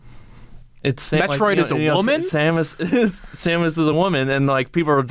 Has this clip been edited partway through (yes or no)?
no